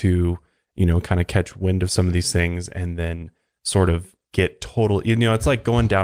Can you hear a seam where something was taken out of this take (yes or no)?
yes